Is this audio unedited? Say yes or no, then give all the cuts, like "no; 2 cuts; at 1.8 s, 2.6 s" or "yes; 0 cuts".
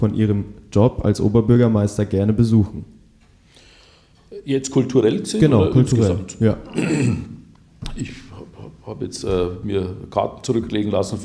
yes; 0 cuts